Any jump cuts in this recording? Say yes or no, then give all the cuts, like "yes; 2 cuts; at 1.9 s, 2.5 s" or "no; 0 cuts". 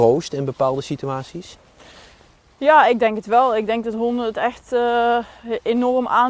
no; 0 cuts